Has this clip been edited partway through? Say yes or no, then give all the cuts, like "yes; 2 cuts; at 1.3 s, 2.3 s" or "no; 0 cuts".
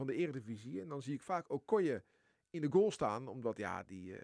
no; 0 cuts